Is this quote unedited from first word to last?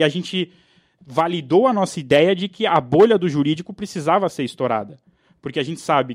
yes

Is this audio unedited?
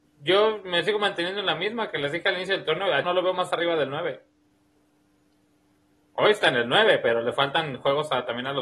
no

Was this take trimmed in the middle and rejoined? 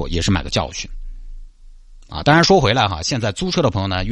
no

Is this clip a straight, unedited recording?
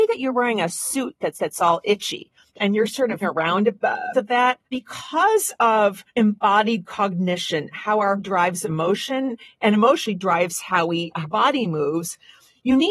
no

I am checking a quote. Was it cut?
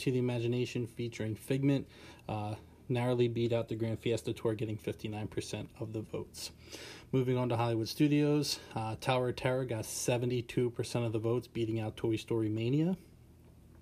no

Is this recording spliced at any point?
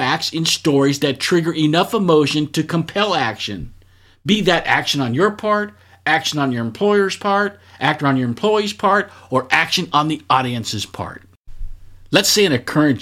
no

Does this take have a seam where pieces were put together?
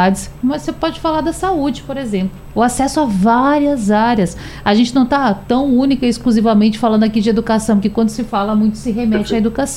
no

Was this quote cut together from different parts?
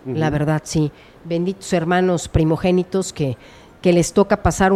no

